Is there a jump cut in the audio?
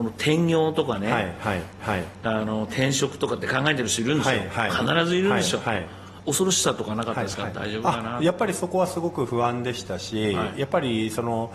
yes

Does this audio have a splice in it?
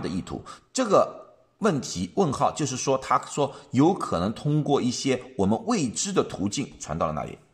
no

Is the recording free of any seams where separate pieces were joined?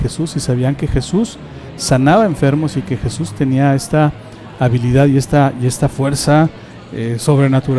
yes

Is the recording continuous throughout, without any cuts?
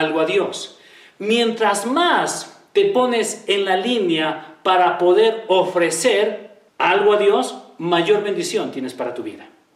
no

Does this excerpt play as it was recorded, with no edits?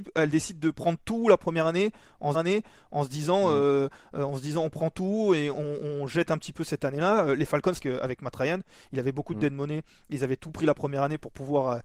no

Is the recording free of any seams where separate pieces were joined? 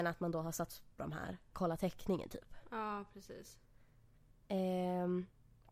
no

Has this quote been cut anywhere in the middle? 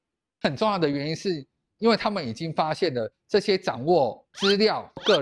no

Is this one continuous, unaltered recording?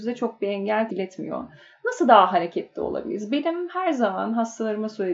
no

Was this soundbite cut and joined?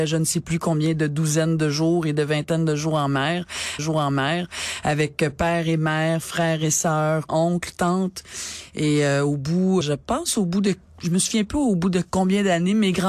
yes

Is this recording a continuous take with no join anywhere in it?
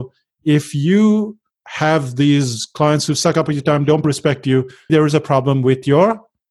no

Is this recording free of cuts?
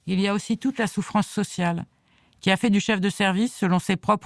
yes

